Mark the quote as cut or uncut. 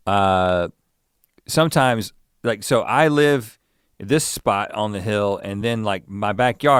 uncut